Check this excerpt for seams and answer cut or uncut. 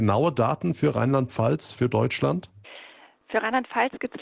uncut